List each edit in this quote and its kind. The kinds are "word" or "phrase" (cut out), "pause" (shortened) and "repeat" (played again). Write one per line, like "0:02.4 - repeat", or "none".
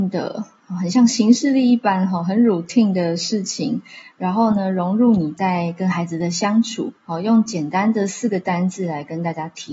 0:07.0 - pause